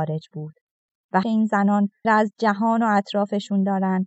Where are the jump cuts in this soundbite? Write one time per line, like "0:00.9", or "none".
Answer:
0:01.2
0:02.0